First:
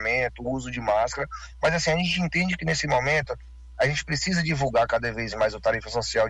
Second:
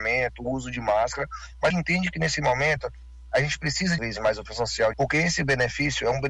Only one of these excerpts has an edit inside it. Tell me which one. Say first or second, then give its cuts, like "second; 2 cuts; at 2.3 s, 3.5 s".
second; 4 cuts; at 1.7 s, 4.0 s, 4.5 s, 4.9 s